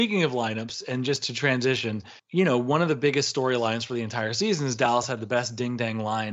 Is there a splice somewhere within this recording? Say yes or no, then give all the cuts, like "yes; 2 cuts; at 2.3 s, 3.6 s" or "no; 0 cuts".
yes; 1 cut; at 2.2 s